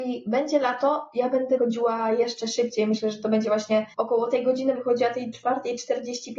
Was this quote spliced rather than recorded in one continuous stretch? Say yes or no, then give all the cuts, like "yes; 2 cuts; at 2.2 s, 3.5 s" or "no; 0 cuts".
yes; 3 cuts; at 1.6 s, 3.9 s, 4.7 s